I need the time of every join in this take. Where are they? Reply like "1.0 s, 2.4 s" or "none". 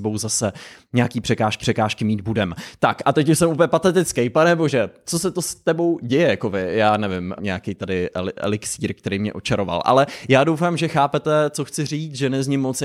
1.6 s, 7.4 s